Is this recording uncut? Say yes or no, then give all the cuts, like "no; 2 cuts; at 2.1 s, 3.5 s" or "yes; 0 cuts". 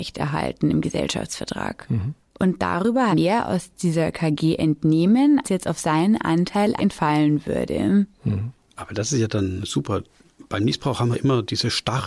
no; 4 cuts; at 3.1 s, 5.4 s, 6.8 s, 11.1 s